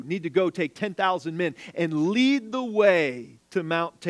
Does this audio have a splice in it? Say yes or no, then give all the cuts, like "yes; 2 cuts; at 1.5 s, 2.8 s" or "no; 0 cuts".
no; 0 cuts